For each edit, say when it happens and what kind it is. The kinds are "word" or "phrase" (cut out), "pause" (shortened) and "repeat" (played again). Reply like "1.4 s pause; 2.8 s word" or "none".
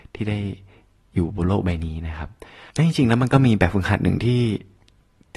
2.7 s pause